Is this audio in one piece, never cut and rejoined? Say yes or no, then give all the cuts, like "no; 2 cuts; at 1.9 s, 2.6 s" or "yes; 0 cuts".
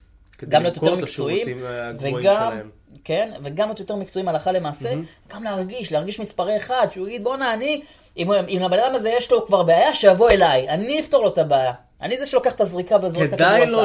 yes; 0 cuts